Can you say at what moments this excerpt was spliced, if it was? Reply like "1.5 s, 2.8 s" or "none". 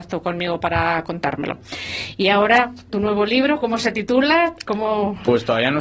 2.9 s